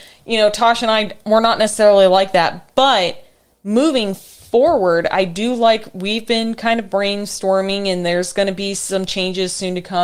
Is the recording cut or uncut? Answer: uncut